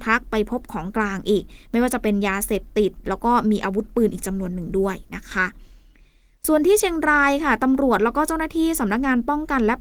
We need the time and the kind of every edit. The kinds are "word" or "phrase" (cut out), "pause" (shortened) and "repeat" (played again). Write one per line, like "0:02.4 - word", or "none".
none